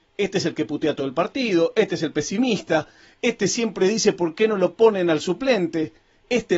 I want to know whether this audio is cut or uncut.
uncut